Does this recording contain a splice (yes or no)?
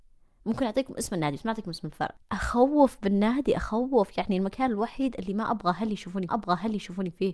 yes